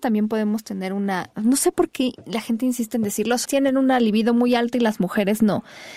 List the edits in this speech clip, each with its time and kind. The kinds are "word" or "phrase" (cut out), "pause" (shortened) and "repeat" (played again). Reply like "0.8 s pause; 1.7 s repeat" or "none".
3.4 s word